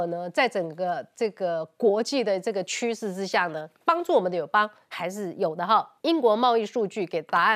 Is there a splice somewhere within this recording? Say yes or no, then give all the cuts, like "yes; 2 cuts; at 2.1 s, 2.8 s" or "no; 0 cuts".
yes; 2 cuts; at 3.7 s, 6.0 s